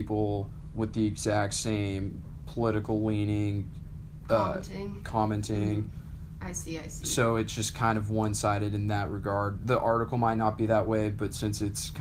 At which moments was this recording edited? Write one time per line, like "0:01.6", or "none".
none